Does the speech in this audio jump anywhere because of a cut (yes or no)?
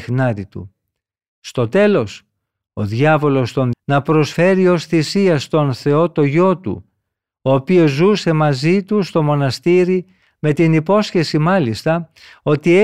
yes